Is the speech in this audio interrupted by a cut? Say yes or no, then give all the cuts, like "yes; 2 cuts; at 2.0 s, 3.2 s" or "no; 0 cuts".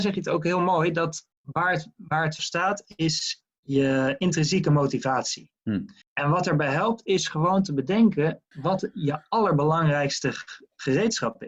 yes; 4 cuts; at 1.3 s, 2.4 s, 6.0 s, 8.5 s